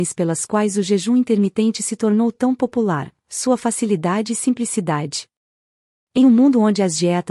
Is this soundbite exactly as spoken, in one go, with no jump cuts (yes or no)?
yes